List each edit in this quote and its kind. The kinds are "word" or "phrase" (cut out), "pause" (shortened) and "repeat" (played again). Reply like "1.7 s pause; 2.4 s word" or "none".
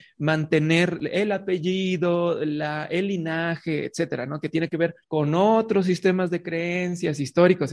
5.0 s pause